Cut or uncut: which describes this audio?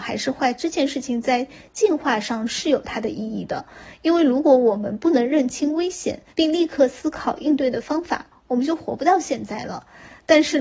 cut